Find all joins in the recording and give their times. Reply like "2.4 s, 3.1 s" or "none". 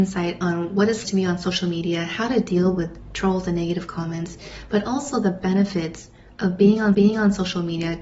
1.1 s, 6.9 s